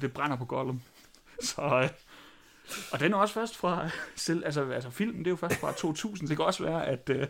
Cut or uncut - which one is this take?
uncut